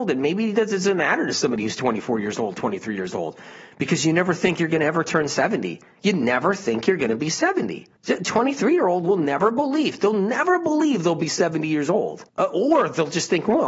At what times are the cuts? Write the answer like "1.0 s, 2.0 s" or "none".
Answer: 5.9 s, 8.0 s, 12.3 s